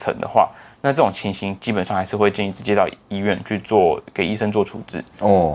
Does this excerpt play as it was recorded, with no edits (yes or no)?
no